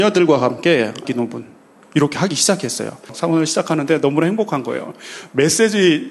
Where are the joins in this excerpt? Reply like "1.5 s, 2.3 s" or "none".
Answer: 1.0 s